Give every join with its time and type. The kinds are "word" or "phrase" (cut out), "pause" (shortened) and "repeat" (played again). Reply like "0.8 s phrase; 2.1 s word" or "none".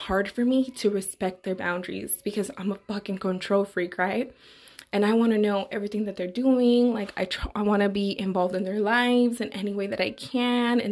none